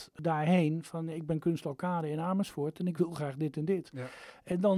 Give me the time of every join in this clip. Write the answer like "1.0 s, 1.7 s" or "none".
none